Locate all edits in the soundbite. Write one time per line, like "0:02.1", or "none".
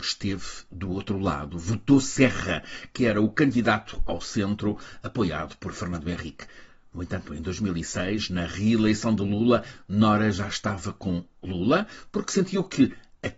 none